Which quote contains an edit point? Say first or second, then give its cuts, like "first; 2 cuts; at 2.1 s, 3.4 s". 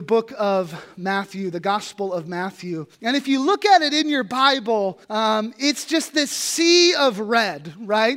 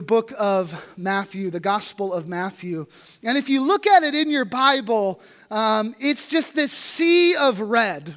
first; 2 cuts; at 2.9 s, 5.0 s